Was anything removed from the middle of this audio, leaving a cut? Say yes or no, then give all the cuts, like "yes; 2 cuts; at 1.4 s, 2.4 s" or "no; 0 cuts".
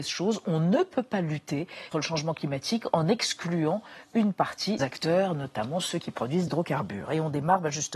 yes; 3 cuts; at 1.9 s, 4.8 s, 6.5 s